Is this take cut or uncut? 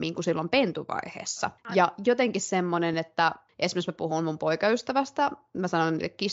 uncut